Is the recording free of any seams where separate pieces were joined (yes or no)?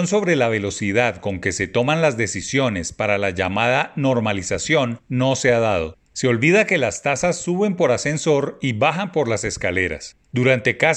yes